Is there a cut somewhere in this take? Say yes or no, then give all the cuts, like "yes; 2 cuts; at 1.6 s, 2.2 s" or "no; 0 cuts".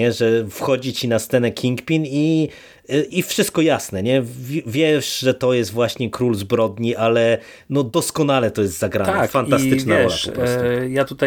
yes; 1 cut; at 3.1 s